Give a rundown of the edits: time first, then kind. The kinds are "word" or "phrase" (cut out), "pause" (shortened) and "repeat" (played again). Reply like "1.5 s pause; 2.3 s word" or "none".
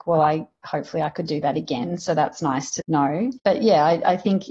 none